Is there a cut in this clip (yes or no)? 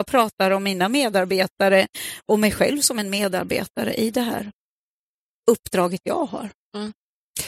no